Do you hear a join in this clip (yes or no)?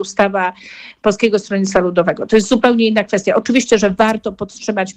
no